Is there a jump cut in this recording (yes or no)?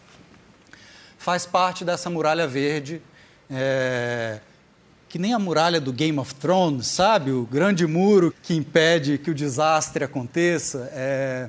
yes